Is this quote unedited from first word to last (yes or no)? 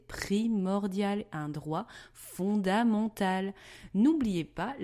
no